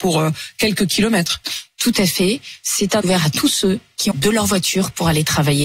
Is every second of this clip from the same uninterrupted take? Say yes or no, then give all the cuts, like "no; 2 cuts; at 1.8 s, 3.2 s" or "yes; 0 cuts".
no; 2 cuts; at 3.0 s, 4.1 s